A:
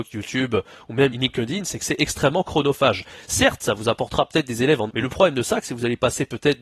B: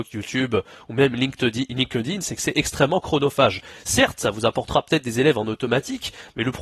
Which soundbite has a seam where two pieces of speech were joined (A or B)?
A